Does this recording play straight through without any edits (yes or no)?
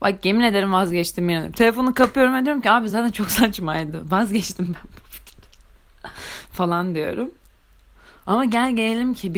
yes